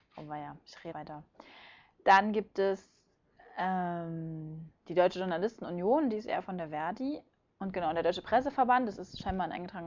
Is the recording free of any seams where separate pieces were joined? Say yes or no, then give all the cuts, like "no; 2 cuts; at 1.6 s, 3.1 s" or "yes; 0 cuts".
no; 1 cut; at 0.9 s